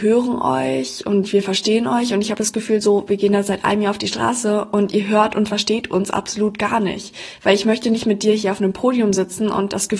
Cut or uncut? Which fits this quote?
uncut